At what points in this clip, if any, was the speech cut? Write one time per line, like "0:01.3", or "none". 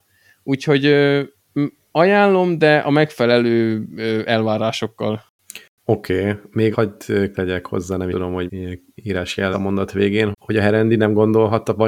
0:06.7
0:07.3
0:08.1
0:08.5
0:09.5
0:10.3